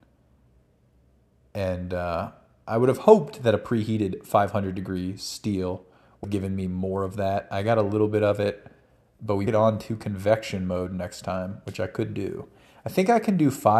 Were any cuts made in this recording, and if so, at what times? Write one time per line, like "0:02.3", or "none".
0:06.2
0:09.5